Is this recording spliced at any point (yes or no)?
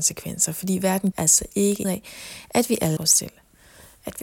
yes